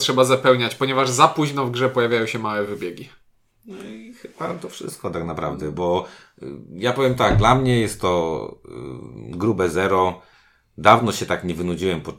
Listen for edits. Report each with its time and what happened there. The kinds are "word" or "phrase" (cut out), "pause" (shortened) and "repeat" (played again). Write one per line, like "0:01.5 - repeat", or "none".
none